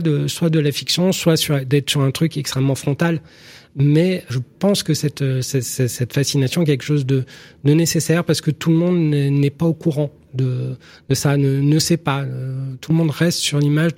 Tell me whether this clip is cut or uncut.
cut